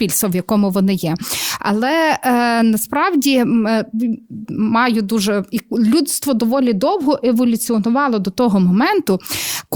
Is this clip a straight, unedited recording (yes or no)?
no